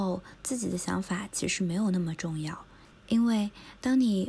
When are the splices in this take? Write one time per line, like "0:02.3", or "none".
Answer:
0:02.9